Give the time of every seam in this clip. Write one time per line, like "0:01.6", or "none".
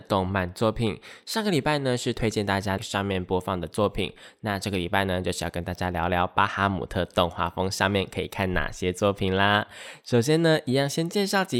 0:02.8